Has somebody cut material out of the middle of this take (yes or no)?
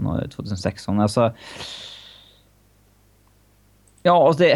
no